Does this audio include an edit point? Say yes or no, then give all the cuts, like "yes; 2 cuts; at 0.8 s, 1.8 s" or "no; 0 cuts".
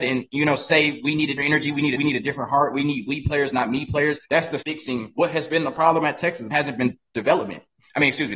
yes; 5 cuts; at 1.4 s, 2.0 s, 4.2 s, 4.6 s, 6.5 s